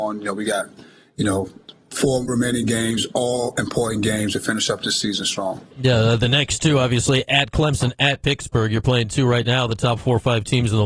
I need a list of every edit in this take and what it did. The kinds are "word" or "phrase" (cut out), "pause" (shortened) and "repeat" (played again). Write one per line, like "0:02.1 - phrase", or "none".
0:02.3 - word